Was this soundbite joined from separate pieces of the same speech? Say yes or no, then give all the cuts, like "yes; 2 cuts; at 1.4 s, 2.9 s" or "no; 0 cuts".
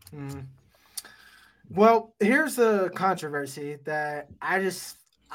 no; 0 cuts